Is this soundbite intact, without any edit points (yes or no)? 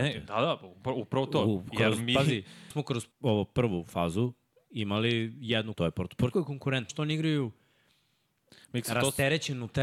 no